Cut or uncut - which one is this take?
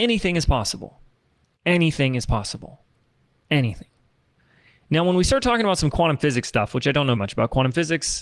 cut